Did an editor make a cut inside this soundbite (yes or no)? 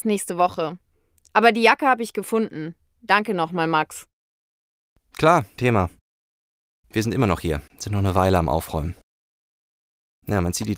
yes